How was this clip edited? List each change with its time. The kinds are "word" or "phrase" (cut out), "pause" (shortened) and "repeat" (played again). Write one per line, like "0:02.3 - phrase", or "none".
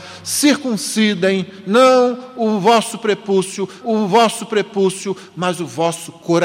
0:03.8 - repeat